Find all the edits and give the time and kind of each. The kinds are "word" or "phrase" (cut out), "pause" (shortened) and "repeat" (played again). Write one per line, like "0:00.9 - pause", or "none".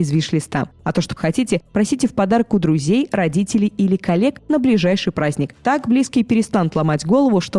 0:01.2 - word